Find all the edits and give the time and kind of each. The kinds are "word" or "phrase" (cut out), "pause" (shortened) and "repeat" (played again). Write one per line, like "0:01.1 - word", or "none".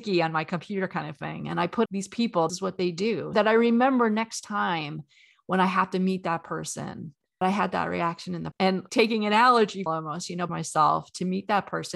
0:01.9 - word
0:02.5 - word
0:03.3 - word
0:07.4 - word
0:08.5 - word
0:08.9 - word
0:09.9 - word
0:10.5 - word